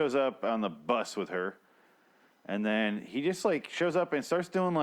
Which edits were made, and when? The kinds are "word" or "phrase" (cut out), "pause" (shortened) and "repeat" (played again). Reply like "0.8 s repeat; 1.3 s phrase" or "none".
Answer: none

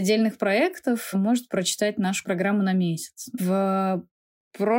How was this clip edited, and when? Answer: 1.1 s word; 1.5 s word; 2.2 s word; 3.4 s phrase

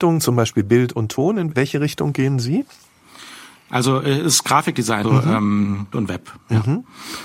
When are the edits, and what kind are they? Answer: 1.5 s word; 5.0 s word; 5.9 s word

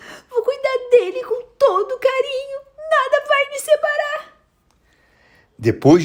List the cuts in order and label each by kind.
none

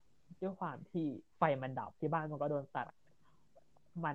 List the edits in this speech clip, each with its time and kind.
1.3 s word; 2.0 s word

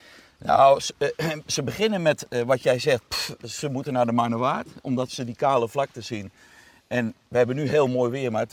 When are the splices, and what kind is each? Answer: none

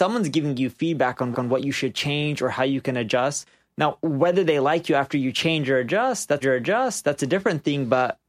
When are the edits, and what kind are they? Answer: 1.3 s repeat; 6.4 s repeat

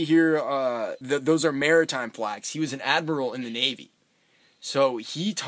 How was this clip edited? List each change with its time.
1.0 s word

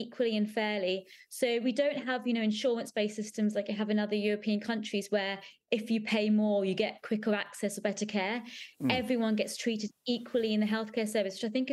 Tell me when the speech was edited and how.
none

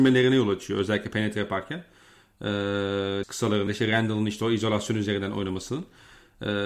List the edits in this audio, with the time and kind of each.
3.2 s word; 3.7 s word

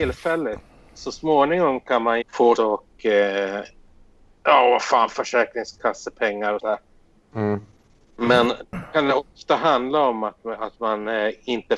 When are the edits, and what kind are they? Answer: 2.2 s phrase; 2.6 s word; 4.4 s word; 6.6 s word

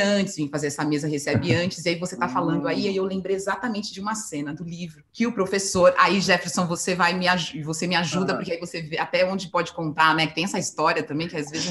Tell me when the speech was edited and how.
5.1 s pause

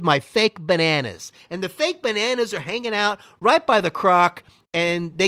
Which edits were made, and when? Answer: none

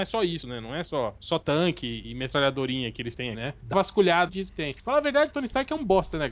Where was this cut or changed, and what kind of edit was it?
3.3 s word; 3.7 s word; 4.3 s phrase

